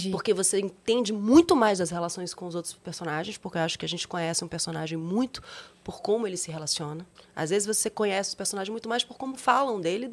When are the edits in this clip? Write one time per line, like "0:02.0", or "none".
0:07.2